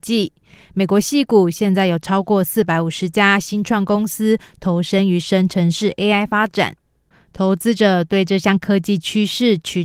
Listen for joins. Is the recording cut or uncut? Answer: uncut